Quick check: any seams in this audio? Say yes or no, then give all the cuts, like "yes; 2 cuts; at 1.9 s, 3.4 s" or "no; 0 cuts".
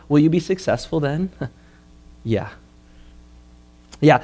no; 0 cuts